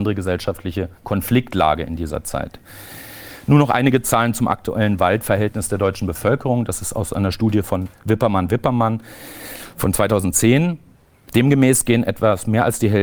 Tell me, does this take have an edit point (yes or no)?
no